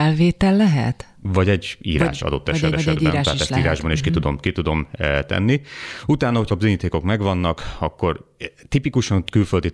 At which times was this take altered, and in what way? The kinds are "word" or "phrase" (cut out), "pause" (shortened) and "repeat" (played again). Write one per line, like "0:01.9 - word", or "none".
0:02.2 - word
0:02.7 - repeat
0:06.5 - word